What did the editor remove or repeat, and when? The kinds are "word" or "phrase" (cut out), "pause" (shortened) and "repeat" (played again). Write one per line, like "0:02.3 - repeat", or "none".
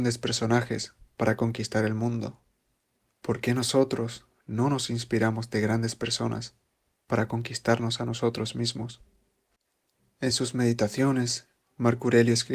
none